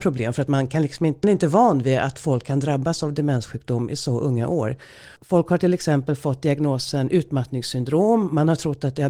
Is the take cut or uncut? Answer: cut